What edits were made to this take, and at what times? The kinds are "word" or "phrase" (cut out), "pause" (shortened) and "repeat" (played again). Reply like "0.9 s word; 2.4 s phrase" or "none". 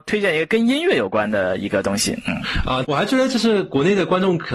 2.8 s word